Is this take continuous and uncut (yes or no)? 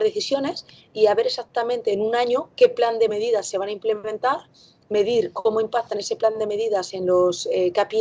yes